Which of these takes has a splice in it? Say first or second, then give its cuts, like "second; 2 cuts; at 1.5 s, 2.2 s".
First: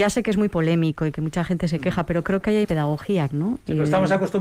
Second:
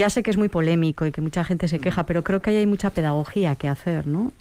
first; 2 cuts; at 2.6 s, 3.3 s